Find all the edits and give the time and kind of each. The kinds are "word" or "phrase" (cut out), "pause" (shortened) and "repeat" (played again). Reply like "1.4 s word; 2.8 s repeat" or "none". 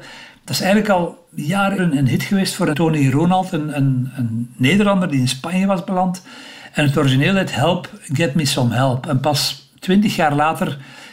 1.8 s word; 2.7 s word